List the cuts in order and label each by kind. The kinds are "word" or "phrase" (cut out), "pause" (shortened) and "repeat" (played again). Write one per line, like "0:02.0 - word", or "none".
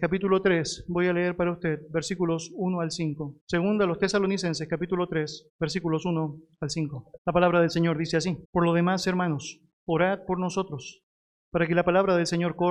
0:03.4 - pause
0:05.5 - pause
0:07.2 - pause
0:08.4 - pause